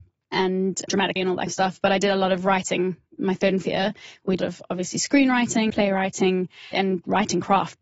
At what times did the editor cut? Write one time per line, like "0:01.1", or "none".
0:01.2
0:01.5
0:03.2
0:03.6
0:04.4
0:05.7
0:06.7